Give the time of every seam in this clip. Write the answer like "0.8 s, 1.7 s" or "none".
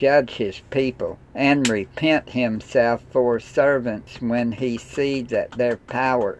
1.2 s